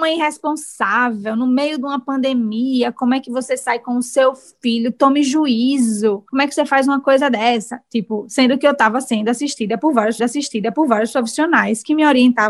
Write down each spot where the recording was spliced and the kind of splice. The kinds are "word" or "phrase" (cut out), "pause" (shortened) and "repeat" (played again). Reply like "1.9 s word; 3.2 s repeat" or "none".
10.2 s repeat